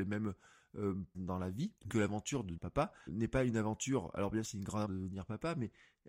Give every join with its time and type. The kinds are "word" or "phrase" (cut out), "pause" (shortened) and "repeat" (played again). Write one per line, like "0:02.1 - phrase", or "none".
0:01.1 - word
0:01.9 - word
0:02.6 - word
0:03.1 - word
0:04.4 - word
0:04.8 - word